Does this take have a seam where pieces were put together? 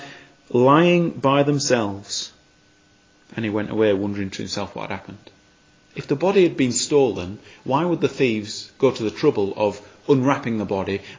no; 0 cuts

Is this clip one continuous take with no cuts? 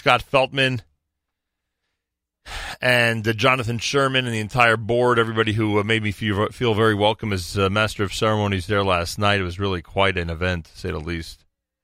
yes; 0 cuts

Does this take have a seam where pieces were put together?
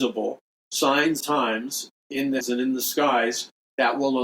yes; 3 cuts; at 1.2 s, 2.0 s, 2.4 s

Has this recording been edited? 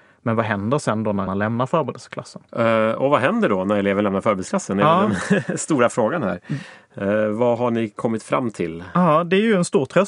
yes; 2 cuts; at 1.3 s, 2.5 s

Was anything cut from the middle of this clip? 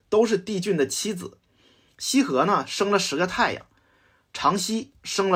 no; 0 cuts

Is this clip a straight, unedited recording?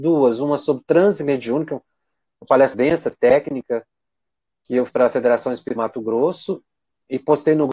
no; 3 cuts; at 2.7 s, 4.9 s, 5.8 s

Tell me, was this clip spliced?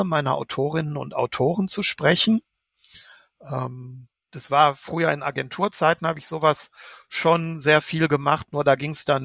no; 0 cuts

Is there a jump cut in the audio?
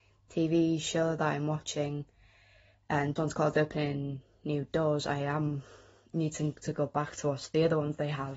yes; 1 cut; at 3.2 s

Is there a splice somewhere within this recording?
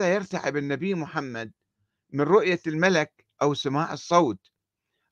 no; 0 cuts

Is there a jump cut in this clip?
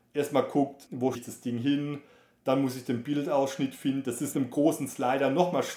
yes; 2 cuts; at 1.1 s, 4.3 s

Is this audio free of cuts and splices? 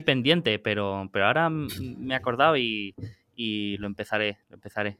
yes; 0 cuts

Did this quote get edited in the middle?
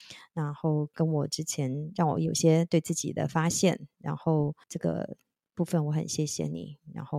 yes; 1 cut; at 4.6 s

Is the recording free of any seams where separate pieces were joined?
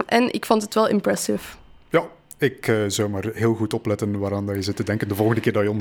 yes; 0 cuts

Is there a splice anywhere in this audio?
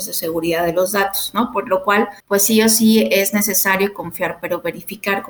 yes; 1 cut; at 2.2 s

